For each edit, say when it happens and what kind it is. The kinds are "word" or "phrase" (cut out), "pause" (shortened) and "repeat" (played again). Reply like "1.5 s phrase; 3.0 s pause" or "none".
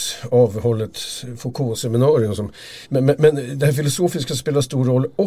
2.8 s pause